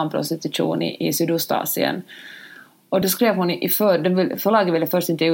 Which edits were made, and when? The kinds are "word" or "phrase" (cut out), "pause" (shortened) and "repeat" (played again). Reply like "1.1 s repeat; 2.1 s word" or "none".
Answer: none

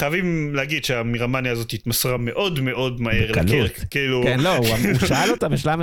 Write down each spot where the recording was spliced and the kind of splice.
none

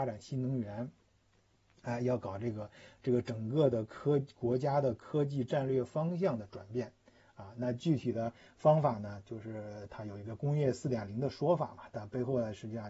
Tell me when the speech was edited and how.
none

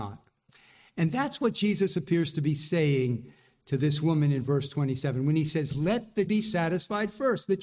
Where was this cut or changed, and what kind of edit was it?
6.3 s word

